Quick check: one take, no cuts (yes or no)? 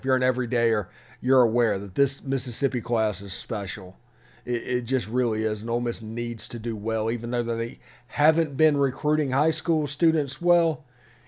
yes